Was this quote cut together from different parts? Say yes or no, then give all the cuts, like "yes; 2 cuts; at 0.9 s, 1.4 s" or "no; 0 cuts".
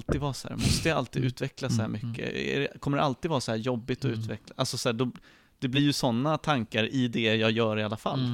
no; 0 cuts